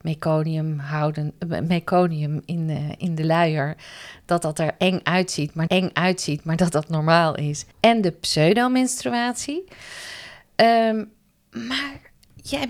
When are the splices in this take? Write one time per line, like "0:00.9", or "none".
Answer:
0:05.7
0:07.7

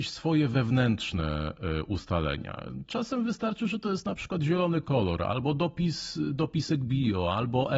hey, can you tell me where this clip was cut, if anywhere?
none

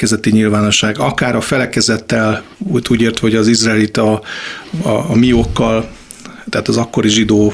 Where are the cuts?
0:02.5

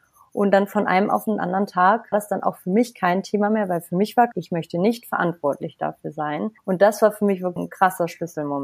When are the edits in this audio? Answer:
0:02.1
0:04.3
0:06.6
0:07.6

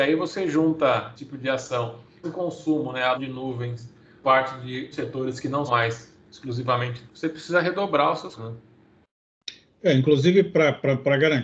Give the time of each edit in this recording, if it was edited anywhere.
0:01.2
0:02.2
0:03.1
0:04.2
0:04.9
0:05.7
0:07.1
0:08.4

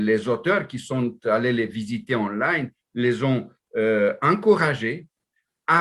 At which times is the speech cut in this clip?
none

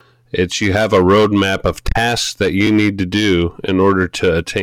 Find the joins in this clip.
none

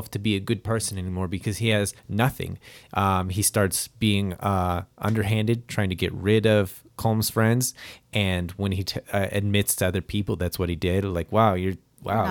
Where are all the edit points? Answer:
0:02.0

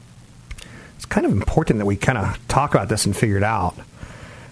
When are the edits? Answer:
none

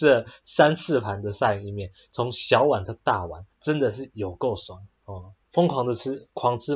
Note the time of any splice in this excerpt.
0:03.5

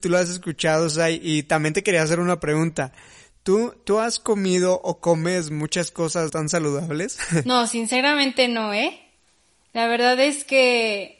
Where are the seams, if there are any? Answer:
0:06.3

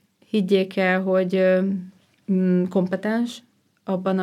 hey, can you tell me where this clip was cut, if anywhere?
0:02.1

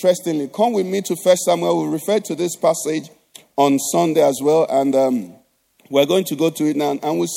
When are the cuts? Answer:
none

